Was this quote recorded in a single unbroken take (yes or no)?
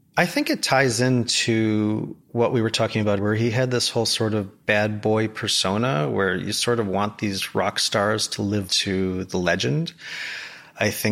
no